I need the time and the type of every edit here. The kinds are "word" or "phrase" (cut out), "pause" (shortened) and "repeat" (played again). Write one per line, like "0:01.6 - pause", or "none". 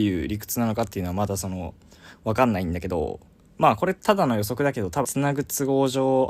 0:03.4 - pause
0:05.0 - word